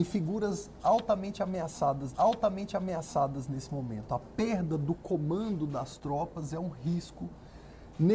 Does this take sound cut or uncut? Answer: cut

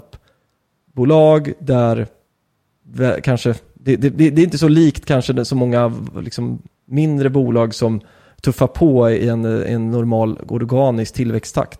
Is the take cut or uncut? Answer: uncut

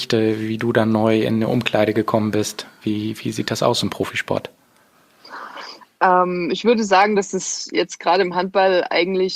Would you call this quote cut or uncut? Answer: uncut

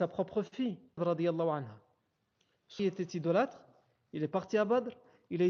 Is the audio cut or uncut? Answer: cut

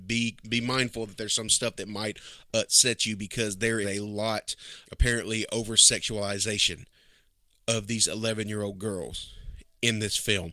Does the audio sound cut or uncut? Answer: cut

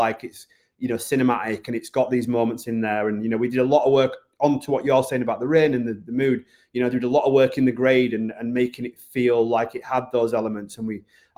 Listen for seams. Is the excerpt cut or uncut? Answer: uncut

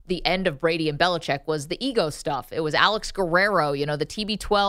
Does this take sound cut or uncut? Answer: uncut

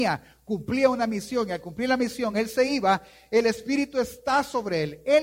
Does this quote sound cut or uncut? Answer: uncut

